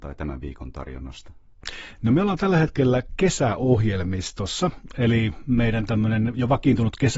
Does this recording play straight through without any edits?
yes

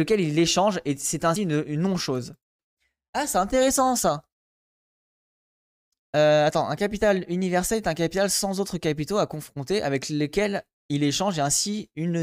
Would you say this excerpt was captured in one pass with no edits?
yes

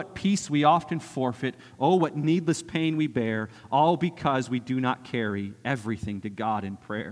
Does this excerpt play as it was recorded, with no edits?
yes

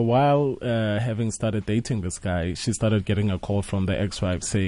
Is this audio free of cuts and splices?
yes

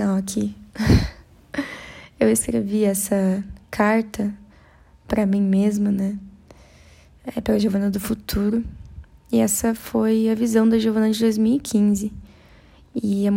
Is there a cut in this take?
yes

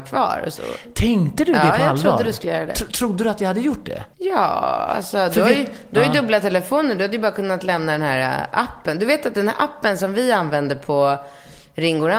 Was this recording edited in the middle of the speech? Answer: yes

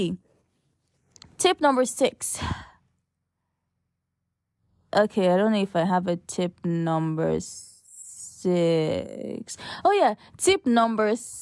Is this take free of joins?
yes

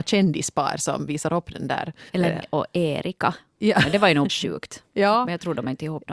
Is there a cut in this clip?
yes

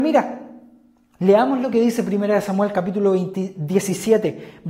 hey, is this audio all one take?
yes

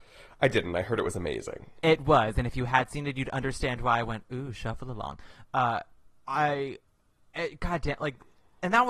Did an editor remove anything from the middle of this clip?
no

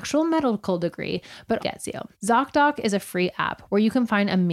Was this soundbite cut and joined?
yes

